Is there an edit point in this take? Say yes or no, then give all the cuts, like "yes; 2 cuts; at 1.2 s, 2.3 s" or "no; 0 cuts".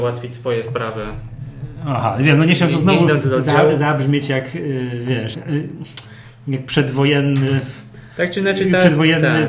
yes; 1 cut; at 5.3 s